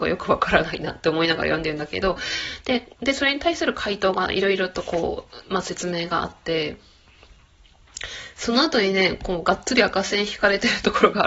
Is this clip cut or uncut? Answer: cut